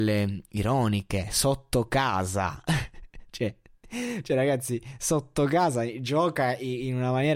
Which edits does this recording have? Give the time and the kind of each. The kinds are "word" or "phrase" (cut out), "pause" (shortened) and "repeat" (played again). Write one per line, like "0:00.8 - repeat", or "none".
none